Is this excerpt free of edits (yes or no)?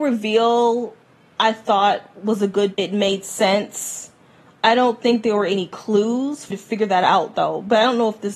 no